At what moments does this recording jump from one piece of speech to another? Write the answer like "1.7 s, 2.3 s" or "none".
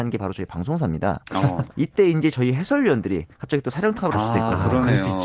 1.7 s, 3.3 s, 4.1 s